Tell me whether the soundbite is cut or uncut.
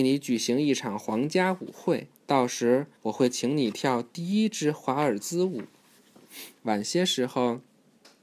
cut